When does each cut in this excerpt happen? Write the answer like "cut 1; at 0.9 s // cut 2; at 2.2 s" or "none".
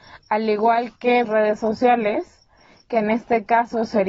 cut 1; at 1.2 s